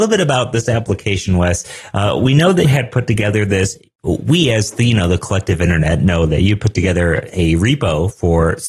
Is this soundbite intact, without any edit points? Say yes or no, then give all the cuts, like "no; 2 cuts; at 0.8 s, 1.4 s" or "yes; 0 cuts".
no; 1 cut; at 2.6 s